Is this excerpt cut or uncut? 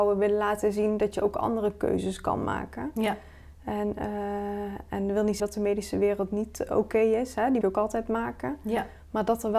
cut